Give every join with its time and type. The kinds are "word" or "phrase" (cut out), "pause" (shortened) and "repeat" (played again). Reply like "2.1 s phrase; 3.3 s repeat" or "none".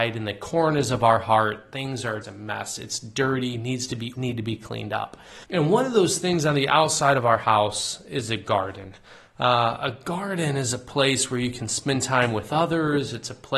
2.2 s word; 4.1 s word; 5.4 s pause